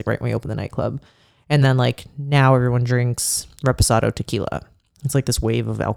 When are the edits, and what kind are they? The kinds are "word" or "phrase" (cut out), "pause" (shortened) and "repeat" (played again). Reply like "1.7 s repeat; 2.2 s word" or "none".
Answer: none